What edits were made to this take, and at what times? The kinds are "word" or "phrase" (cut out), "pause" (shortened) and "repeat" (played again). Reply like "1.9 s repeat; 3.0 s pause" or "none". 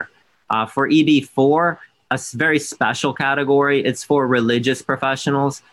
none

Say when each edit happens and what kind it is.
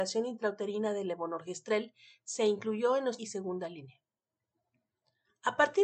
3.2 s phrase

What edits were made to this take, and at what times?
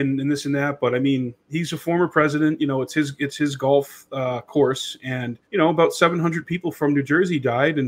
5.4 s pause

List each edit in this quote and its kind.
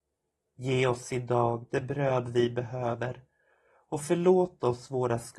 none

